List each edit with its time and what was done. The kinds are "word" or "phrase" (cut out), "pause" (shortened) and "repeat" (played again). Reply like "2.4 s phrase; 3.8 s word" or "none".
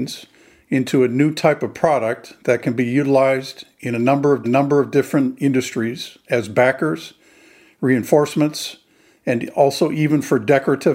4.4 s repeat